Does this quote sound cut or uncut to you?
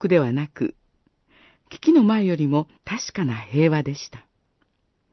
cut